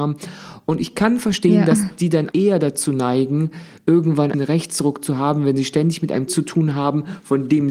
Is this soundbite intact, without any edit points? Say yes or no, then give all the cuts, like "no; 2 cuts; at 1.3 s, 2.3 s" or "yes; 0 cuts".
no; 3 cuts; at 2.3 s, 4.3 s, 6.3 s